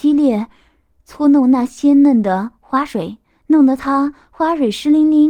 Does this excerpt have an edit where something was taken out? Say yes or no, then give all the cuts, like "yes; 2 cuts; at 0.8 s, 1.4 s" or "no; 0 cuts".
no; 0 cuts